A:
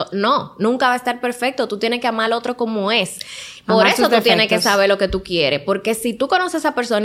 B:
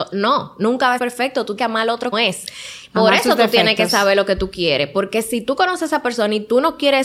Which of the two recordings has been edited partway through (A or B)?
B